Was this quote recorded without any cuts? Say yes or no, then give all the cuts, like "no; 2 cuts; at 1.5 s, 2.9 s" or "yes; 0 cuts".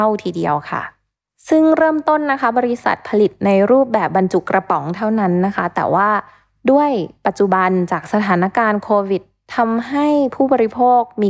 yes; 0 cuts